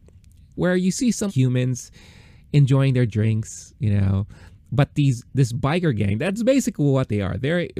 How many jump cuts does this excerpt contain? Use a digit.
2